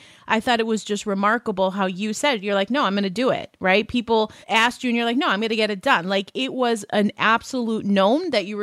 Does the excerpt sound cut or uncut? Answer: cut